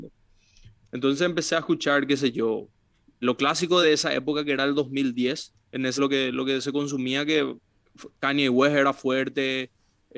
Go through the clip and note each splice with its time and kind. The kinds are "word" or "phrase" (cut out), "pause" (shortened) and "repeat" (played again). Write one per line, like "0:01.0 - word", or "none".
0:03.2 - word
0:03.8 - word
0:05.6 - pause
0:06.0 - word